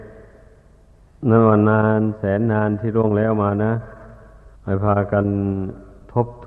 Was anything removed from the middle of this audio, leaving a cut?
yes; 1 cut; at 4.6 s

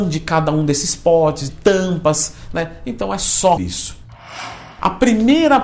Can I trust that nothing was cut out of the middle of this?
no; 2 cuts; at 1.5 s, 3.6 s

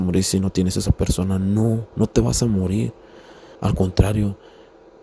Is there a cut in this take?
yes; 1 cut; at 3.6 s

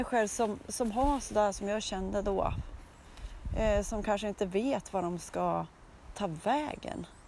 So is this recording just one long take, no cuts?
yes; 0 cuts

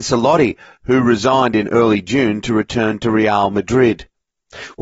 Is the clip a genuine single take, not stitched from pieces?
yes; 0 cuts

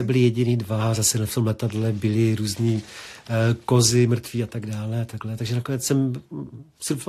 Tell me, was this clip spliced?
no; 0 cuts

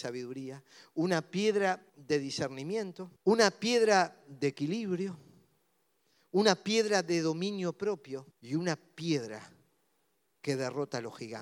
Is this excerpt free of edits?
no; 3 cuts; at 1.9 s, 3.2 s, 8.3 s

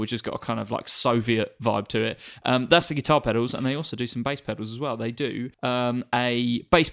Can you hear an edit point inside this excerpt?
yes; 1 cut; at 5.5 s

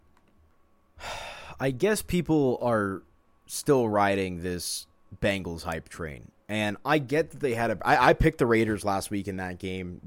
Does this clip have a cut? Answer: no; 0 cuts

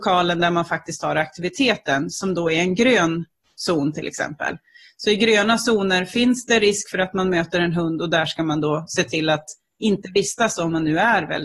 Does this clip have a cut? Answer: no; 0 cuts

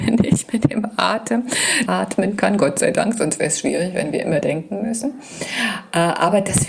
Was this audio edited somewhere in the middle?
yes; 2 cuts; at 1.9 s, 4.4 s

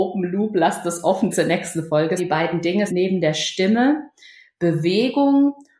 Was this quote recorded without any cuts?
no; 3 cuts; at 1.3 s, 2.2 s, 2.9 s

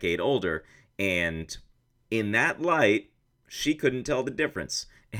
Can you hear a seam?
yes; 1 cut; at 3.3 s

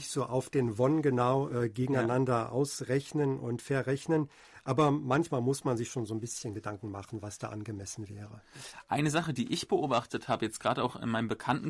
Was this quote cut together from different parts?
no; 0 cuts

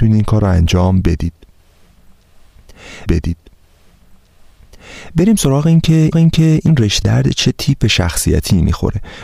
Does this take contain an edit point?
yes; 3 cuts; at 3.1 s, 6.1 s, 7.0 s

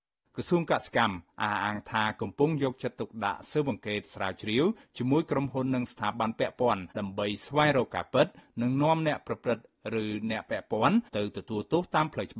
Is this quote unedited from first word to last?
no; 2 cuts; at 6.9 s, 11.1 s

